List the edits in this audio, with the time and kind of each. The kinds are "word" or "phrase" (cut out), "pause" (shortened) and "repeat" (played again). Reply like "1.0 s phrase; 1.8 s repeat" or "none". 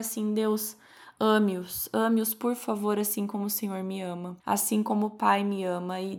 4.4 s pause